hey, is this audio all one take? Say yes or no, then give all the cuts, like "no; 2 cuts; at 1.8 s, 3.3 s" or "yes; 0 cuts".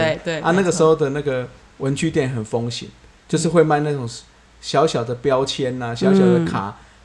yes; 0 cuts